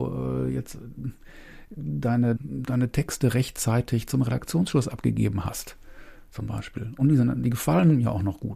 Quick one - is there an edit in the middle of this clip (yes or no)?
yes